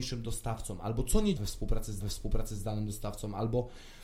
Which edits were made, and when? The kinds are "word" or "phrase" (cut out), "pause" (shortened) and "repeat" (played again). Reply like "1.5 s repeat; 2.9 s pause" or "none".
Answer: 1.4 s word; 2.0 s repeat